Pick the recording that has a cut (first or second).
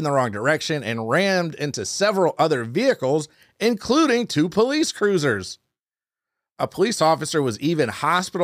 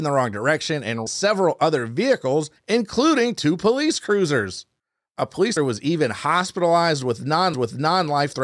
second